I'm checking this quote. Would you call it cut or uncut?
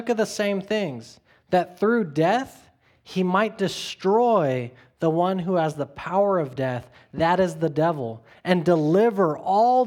uncut